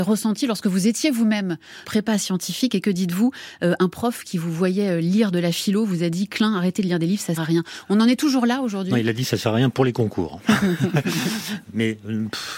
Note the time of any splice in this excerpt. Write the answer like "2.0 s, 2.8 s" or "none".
1.8 s, 7.4 s, 11.6 s